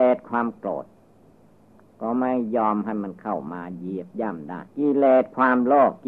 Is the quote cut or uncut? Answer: cut